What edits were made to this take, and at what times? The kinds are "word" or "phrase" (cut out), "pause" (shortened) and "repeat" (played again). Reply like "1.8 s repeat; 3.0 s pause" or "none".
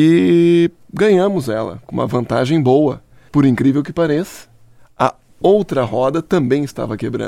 none

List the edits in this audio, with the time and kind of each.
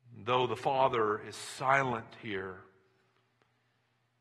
none

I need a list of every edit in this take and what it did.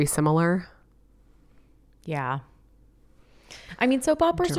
none

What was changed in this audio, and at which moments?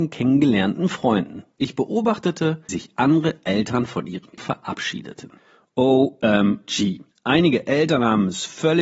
1.5 s pause; 2.7 s word; 4.4 s word; 7.1 s pause

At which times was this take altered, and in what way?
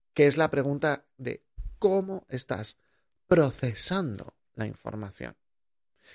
none

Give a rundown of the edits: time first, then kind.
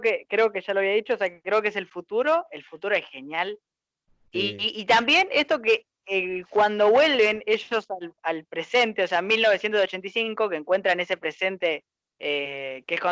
none

